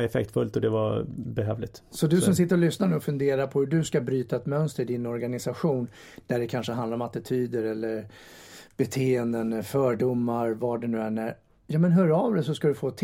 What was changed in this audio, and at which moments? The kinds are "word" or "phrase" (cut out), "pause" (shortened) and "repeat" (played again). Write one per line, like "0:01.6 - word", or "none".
none